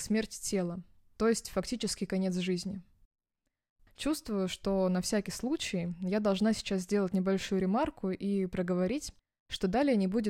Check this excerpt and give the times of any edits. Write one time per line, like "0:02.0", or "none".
none